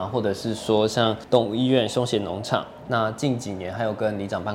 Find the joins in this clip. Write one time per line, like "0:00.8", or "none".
0:02.9